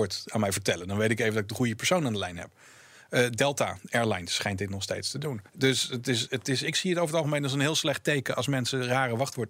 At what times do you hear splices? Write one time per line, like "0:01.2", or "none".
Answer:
0:05.5